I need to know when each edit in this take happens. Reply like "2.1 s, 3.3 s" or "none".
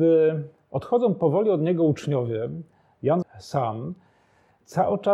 3.2 s